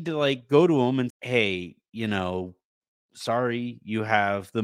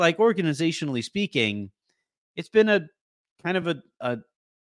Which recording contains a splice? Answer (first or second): first